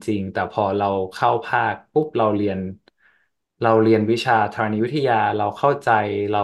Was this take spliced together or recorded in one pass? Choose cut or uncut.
uncut